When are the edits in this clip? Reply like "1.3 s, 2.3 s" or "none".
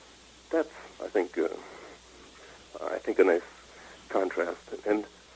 0.9 s